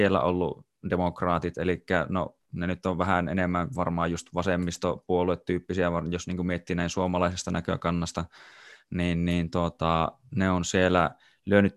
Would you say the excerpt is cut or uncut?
uncut